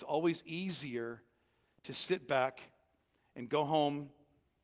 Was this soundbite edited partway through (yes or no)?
no